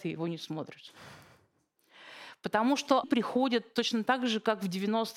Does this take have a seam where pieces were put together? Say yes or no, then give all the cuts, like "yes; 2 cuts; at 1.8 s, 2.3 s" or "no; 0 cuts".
yes; 1 cut; at 3.0 s